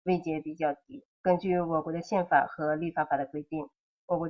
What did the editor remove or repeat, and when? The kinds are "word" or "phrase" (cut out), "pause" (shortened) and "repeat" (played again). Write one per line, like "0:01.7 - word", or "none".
0:01.1 - pause